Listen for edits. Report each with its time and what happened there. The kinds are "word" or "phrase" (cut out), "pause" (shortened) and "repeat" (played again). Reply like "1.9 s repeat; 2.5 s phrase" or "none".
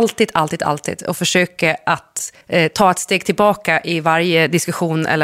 2.4 s pause